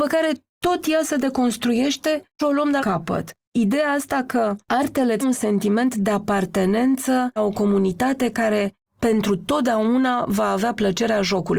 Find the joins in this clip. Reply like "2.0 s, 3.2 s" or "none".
2.4 s, 2.8 s, 4.6 s, 5.2 s, 7.4 s